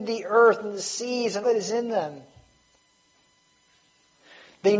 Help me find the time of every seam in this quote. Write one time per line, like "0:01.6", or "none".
0:01.4